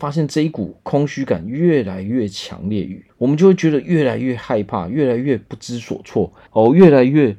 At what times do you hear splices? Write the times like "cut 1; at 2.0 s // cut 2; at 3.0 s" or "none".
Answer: cut 1; at 3.1 s // cut 2; at 6.5 s